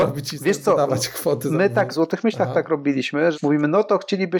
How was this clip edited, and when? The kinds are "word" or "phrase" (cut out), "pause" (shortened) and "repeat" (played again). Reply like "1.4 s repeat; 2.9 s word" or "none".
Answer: 1.9 s word; 3.3 s word